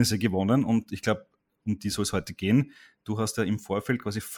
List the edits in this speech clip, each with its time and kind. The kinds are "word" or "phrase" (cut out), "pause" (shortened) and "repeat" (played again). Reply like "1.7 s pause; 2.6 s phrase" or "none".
none